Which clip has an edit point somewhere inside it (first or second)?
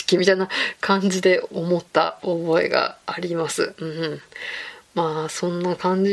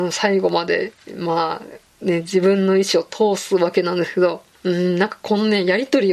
first